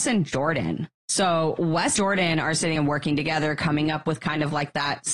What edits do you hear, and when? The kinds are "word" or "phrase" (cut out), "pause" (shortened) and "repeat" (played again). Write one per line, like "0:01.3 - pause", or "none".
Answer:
0:01.0 - pause
0:02.0 - word
0:02.8 - phrase